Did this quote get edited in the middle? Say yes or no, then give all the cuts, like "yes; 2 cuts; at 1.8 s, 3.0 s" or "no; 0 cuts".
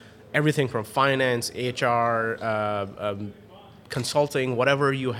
no; 0 cuts